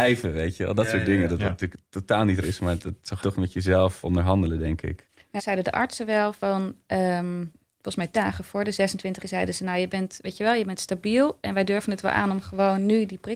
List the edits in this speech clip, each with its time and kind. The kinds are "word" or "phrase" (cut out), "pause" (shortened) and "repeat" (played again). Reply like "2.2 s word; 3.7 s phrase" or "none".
2.4 s word; 3.2 s word; 4.0 s word; 5.4 s word; 8.1 s word; 9.2 s word